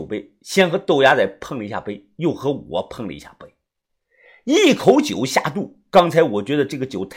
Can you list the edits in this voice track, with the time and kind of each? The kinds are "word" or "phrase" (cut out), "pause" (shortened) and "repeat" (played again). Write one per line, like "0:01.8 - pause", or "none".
none